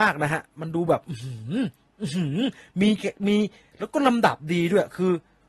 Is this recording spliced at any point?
no; 0 cuts

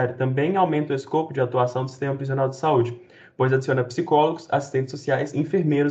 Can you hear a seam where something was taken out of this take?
no; 0 cuts

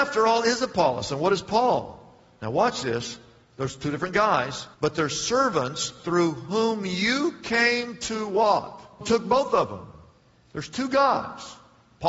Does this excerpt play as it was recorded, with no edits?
no; 2 cuts; at 4.7 s, 9.0 s

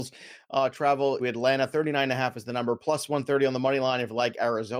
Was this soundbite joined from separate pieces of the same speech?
yes; 1 cut; at 1.2 s

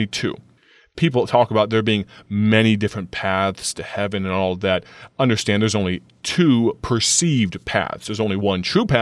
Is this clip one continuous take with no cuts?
yes; 0 cuts

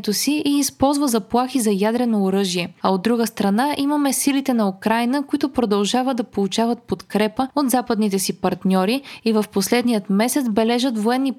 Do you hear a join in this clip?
no; 0 cuts

